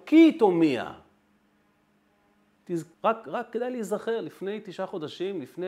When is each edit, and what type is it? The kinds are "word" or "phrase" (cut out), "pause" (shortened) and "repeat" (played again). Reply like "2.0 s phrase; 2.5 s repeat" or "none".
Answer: 2.9 s pause